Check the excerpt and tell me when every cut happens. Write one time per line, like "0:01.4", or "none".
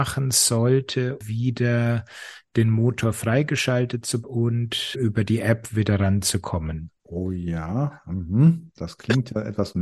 0:01.2
0:04.2
0:04.9
0:07.0

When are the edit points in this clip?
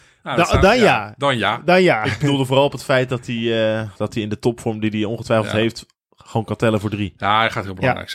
0:04.0

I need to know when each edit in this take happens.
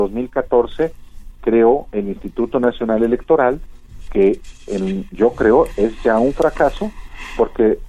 0:01.4

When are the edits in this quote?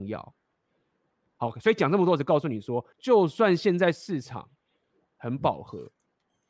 0:02.9

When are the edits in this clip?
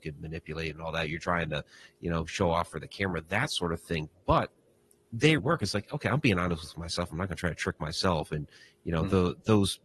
0:01.2
0:05.4

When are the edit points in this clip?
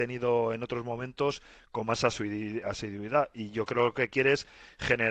none

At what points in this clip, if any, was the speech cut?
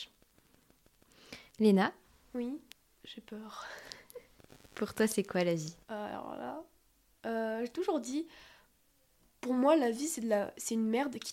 0:01.5
0:02.7
0:05.8

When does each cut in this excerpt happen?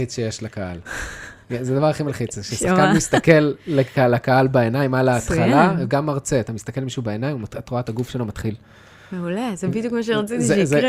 none

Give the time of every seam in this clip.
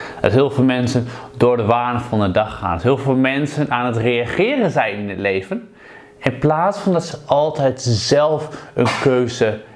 0:07.1

